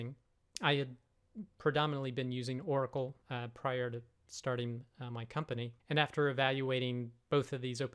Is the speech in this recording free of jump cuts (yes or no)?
no